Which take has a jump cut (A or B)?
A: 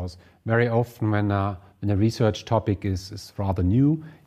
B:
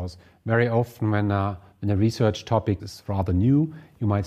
B